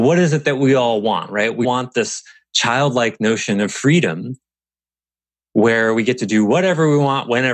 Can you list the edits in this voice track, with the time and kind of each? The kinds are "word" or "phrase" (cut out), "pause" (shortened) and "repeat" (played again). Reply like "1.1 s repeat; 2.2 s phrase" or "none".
1.6 s word